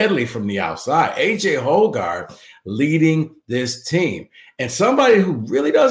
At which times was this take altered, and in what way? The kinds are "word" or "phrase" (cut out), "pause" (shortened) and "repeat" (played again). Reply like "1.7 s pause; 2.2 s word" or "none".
none